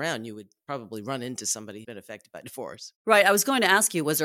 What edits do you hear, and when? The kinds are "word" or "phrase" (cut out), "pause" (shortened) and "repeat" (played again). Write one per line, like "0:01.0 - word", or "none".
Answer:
0:01.8 - word
0:02.9 - pause